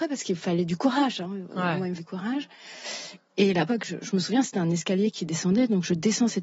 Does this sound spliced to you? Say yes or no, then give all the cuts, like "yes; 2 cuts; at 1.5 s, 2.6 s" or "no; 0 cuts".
yes; 2 cuts; at 2.0 s, 3.7 s